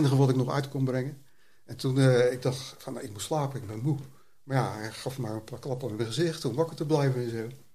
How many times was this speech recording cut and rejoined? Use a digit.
0